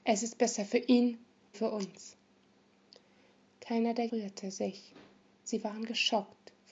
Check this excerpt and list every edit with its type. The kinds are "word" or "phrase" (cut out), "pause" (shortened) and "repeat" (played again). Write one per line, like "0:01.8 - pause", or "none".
0:01.5 - word
0:04.1 - word